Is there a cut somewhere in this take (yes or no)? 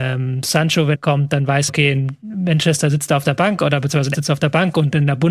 yes